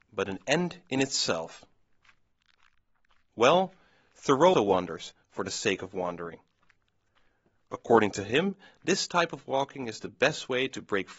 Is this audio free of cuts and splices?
no; 1 cut; at 4.5 s

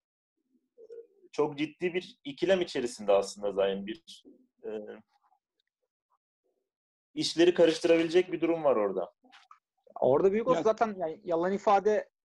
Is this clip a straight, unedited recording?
yes; 0 cuts

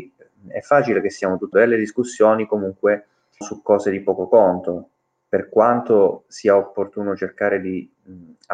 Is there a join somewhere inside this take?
yes; 2 cuts; at 1.5 s, 3.4 s

